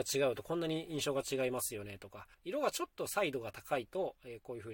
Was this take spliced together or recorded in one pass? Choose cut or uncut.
cut